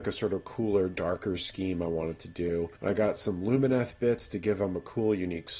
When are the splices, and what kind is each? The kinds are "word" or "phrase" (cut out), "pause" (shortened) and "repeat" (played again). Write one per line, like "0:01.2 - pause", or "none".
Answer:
0:02.8 - pause